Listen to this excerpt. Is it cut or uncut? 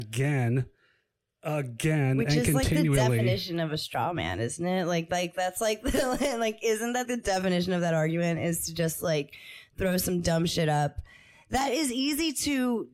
cut